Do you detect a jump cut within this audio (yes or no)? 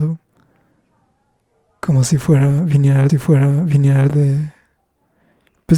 yes